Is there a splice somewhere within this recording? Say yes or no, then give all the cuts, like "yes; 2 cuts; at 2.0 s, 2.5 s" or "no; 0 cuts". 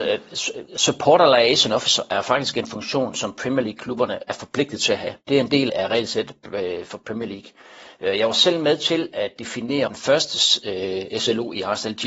yes; 3 cuts; at 5.2 s, 5.7 s, 9.9 s